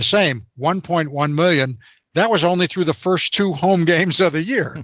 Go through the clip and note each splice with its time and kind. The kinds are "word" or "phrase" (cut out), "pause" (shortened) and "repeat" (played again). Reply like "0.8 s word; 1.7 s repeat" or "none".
none